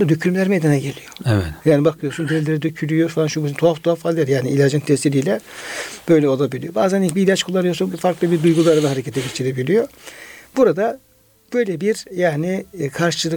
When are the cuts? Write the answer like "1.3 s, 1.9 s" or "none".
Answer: 7.9 s